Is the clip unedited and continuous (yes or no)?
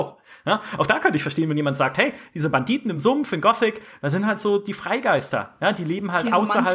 yes